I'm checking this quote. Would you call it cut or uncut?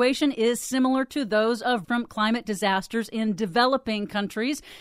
cut